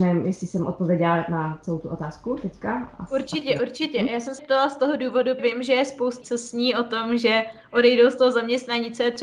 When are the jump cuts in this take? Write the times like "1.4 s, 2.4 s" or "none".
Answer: 4.4 s, 5.4 s, 6.2 s